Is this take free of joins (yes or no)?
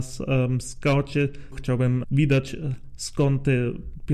no